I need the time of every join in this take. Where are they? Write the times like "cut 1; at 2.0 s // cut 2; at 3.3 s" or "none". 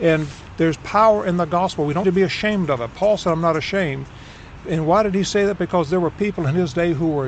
cut 1; at 2.0 s

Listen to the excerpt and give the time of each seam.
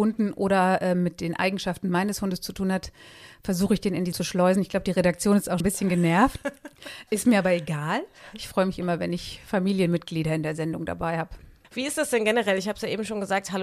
cut 1; at 4.1 s // cut 2; at 5.6 s

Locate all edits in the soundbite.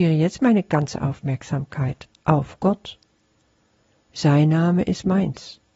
none

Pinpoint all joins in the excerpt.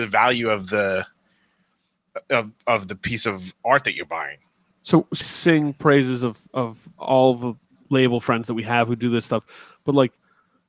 cut 1; at 5.2 s

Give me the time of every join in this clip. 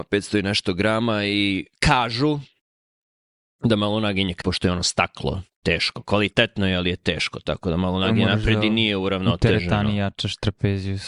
cut 1; at 4.4 s

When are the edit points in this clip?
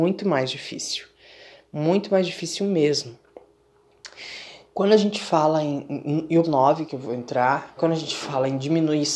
cut 1; at 6.4 s // cut 2; at 6.9 s // cut 3; at 7.8 s

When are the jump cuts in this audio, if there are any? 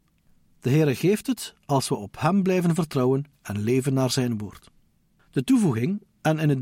none

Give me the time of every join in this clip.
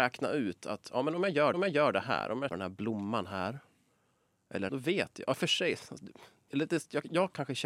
cut 1; at 1.5 s // cut 2; at 2.5 s // cut 3; at 4.7 s // cut 4; at 6.5 s

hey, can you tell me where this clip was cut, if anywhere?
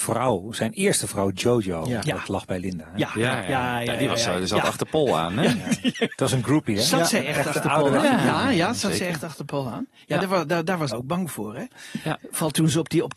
cut 1; at 2.2 s // cut 2; at 10.9 s

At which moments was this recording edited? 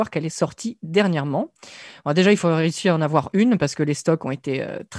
none

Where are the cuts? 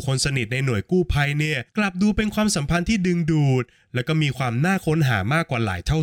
cut 1; at 1.7 s

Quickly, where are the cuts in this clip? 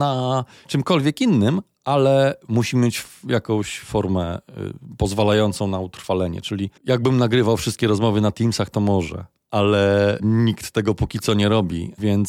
cut 1; at 6.8 s

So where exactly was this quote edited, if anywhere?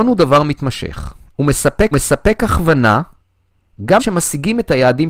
cut 1; at 1.9 s // cut 2; at 4.0 s

